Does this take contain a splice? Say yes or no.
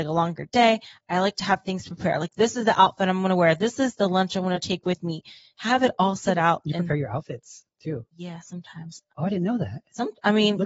no